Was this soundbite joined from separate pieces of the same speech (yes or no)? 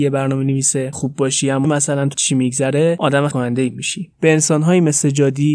yes